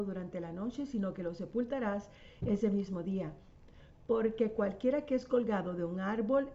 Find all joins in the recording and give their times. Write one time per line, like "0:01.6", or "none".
none

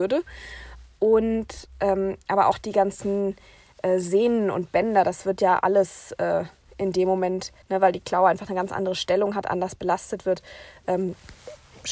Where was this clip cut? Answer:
0:07.6

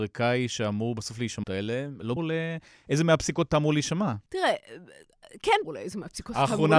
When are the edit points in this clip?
0:01.4
0:02.2
0:04.3
0:05.6

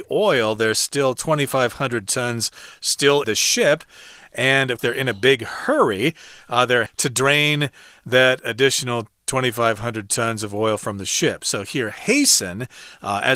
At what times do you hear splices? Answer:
0:03.2
0:04.8
0:06.9

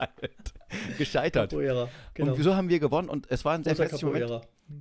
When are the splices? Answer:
none

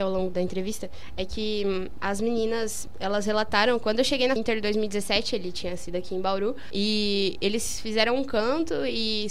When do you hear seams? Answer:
0:04.4

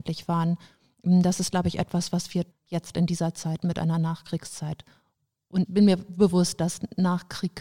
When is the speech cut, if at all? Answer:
0:02.5
0:05.6

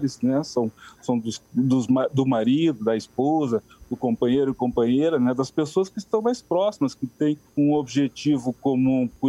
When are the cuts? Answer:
0:07.5

